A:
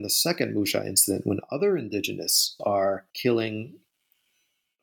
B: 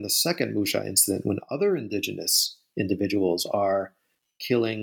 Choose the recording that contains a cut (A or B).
A